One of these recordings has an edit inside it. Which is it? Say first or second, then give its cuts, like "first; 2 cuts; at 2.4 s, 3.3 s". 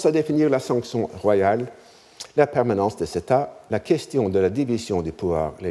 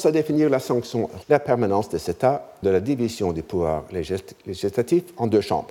second; 2 cuts; at 1.2 s, 2.6 s